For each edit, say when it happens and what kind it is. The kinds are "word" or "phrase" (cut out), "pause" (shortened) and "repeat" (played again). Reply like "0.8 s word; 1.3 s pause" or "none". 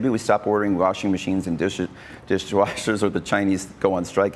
none